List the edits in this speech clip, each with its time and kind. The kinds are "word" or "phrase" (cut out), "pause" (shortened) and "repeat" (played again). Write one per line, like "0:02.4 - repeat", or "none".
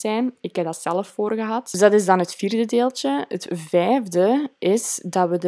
none